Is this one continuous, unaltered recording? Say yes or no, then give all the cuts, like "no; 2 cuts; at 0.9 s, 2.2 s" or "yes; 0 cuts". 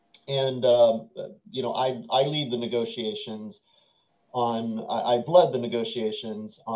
yes; 0 cuts